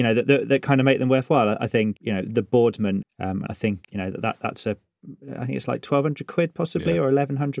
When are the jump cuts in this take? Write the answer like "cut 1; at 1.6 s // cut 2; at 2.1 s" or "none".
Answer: cut 1; at 2.0 s // cut 2; at 3.0 s // cut 3; at 3.5 s // cut 4; at 3.8 s